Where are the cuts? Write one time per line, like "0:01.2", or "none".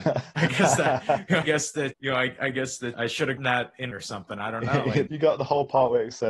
0:01.4
0:01.9
0:02.9
0:03.4
0:03.9
0:05.1